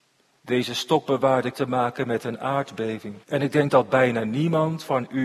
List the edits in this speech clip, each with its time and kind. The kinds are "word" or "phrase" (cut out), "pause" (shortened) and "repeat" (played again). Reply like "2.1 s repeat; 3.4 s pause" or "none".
1.5 s word; 3.2 s pause